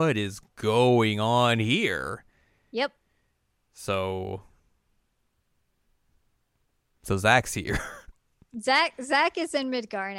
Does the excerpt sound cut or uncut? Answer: uncut